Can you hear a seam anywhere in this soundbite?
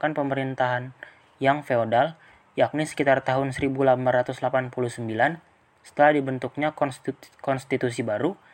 no; 0 cuts

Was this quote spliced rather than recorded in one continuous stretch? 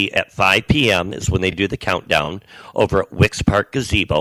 no; 0 cuts

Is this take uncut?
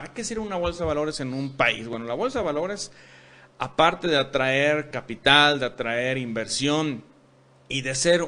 yes; 0 cuts

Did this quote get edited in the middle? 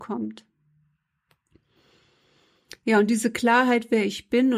no; 0 cuts

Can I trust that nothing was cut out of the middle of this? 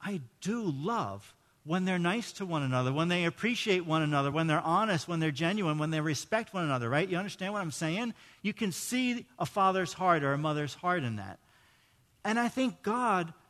yes; 0 cuts

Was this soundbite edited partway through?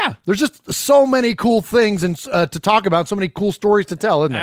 no; 0 cuts

